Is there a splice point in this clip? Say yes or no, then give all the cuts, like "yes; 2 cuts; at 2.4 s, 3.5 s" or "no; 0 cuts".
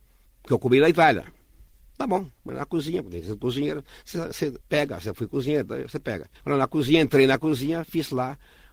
yes; 3 cuts; at 2.4 s, 4.6 s, 6.3 s